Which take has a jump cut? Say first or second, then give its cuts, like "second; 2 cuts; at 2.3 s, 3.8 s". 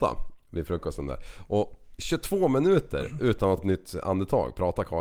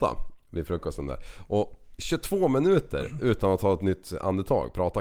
first; 1 cut; at 3.6 s